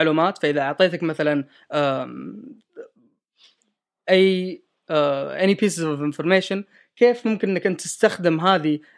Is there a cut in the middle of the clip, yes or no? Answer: no